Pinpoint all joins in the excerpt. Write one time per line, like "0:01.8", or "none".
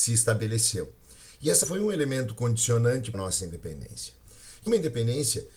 0:01.6
0:03.1
0:04.7